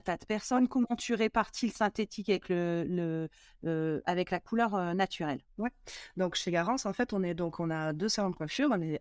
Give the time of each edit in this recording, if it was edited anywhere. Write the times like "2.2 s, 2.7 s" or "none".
none